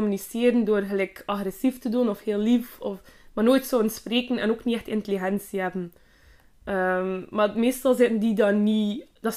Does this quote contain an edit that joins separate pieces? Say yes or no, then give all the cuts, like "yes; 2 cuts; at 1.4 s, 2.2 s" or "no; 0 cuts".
no; 0 cuts